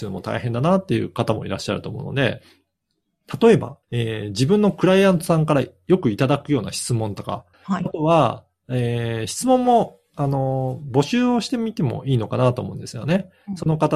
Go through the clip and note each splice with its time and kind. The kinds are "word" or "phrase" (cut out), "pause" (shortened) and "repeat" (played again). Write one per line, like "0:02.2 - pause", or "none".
0:03.8 - pause
0:07.5 - pause